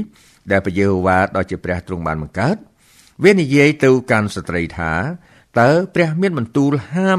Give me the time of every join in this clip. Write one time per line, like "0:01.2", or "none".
none